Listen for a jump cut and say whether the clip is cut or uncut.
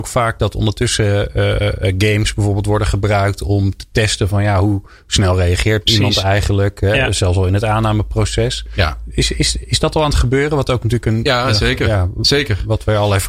uncut